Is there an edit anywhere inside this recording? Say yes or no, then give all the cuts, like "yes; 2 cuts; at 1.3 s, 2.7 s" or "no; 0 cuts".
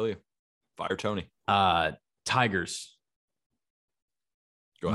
yes; 1 cut; at 1.4 s